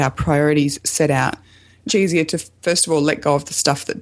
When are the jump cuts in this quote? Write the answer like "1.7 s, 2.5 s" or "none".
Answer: 1.9 s